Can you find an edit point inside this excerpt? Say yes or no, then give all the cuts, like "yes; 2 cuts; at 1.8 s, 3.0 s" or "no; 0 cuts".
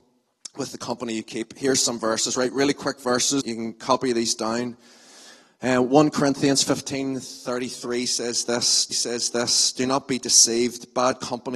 yes; 2 cuts; at 3.4 s, 8.9 s